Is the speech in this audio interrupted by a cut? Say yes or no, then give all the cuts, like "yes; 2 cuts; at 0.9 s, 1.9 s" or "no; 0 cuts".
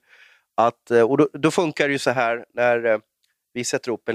no; 0 cuts